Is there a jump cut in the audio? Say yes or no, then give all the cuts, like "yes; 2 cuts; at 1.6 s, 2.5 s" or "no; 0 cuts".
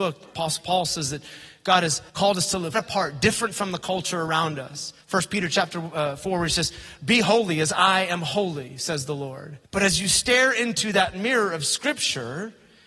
yes; 4 cuts; at 2.1 s, 2.7 s, 5.0 s, 9.6 s